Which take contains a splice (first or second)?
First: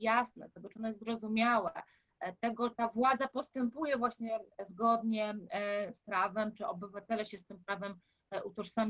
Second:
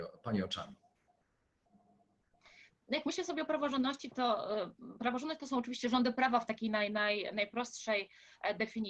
first